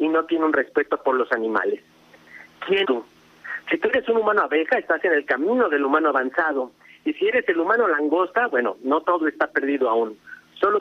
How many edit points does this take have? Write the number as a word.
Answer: one